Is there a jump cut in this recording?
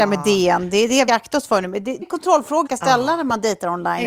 yes; 3 cuts; at 1.1 s, 2.0 s, 2.7 s

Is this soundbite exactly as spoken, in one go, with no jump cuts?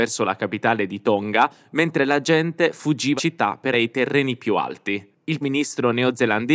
no; 4 cuts; at 1.7 s, 3.2 s, 3.7 s, 5.4 s

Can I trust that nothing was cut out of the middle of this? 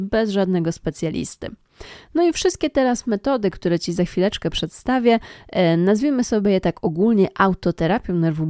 yes; 0 cuts

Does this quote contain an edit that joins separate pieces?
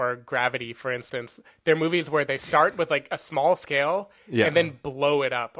no; 0 cuts

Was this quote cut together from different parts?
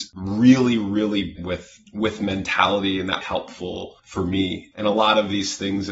yes; 4 cuts; at 1.4 s, 1.8 s, 3.2 s, 4.0 s

